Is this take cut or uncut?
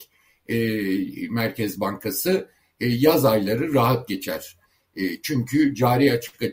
uncut